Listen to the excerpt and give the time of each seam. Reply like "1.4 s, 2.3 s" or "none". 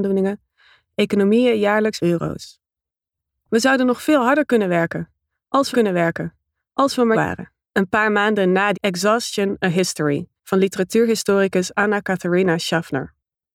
2.0 s, 5.7 s, 7.1 s, 7.6 s, 8.7 s, 10.4 s